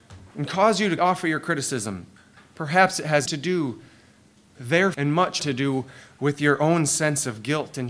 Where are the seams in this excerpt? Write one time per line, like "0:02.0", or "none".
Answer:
0:01.0
0:02.4
0:03.3
0:04.5
0:04.9
0:05.4